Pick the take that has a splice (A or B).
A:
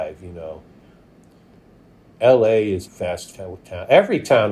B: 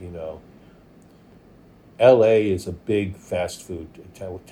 A